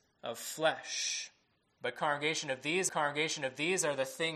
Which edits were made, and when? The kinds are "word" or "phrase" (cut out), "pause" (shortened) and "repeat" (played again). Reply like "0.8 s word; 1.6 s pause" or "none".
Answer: 1.5 s pause; 2.9 s repeat